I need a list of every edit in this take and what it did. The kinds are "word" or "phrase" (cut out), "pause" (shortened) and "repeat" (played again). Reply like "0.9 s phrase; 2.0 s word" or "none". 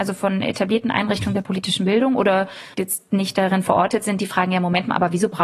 2.7 s phrase